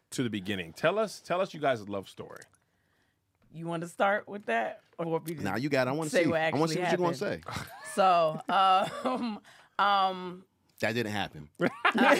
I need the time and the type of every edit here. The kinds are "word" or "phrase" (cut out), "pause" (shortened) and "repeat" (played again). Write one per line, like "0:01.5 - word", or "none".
0:05.0 - word